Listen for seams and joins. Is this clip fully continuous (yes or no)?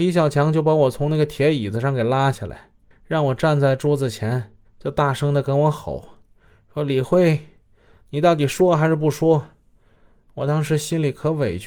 no